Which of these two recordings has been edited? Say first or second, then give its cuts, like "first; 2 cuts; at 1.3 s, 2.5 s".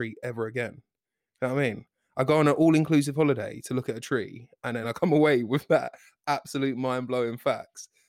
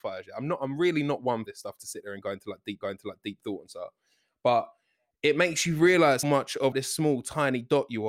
second; 4 cuts; at 1.5 s, 2.8 s, 6.2 s, 6.7 s